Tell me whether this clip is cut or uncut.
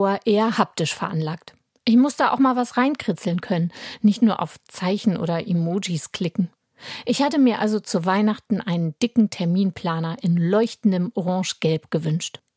uncut